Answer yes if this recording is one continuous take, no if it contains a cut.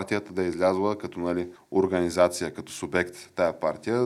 no